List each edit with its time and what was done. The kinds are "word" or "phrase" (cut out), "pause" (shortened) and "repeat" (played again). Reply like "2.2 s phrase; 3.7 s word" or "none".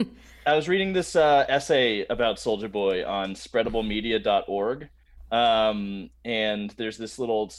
none